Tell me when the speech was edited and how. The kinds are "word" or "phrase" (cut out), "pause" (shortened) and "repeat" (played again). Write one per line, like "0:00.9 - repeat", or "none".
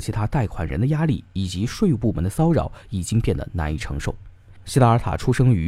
none